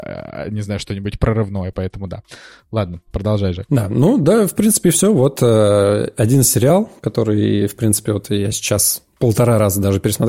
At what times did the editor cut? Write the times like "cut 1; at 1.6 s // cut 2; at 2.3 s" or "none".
none